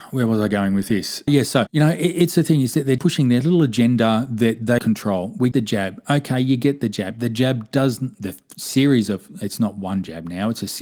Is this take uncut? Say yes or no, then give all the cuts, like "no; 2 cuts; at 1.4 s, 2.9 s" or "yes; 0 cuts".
no; 5 cuts; at 1.3 s, 1.7 s, 3.0 s, 4.8 s, 5.5 s